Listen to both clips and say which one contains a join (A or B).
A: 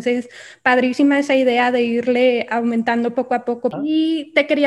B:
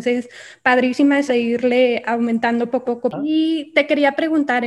B